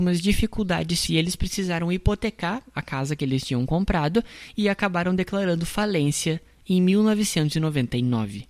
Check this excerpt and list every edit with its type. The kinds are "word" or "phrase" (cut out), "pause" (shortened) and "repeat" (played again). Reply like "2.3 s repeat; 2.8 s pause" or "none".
1.1 s word